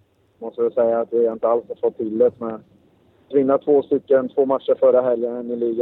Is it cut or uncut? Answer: cut